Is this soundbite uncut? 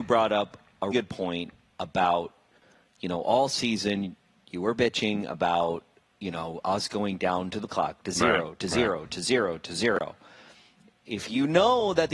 no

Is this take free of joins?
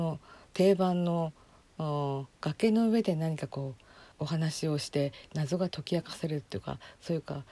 no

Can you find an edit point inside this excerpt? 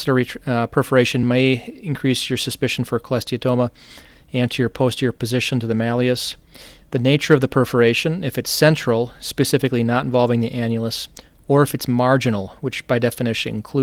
no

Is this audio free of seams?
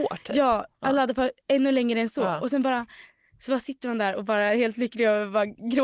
yes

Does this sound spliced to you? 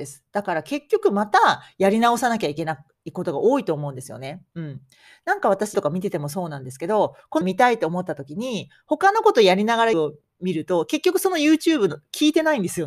yes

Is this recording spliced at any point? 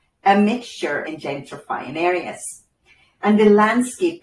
yes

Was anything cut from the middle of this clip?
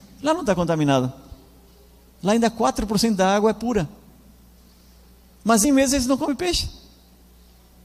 yes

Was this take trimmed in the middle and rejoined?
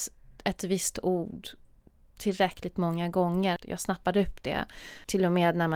no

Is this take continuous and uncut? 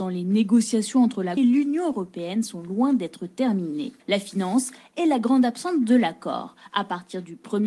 no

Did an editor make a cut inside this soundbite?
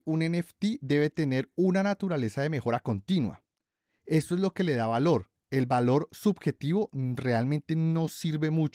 no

